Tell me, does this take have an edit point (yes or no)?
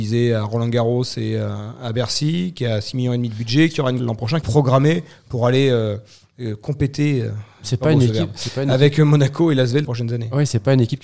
yes